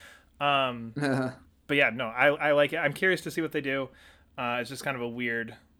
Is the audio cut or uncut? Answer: uncut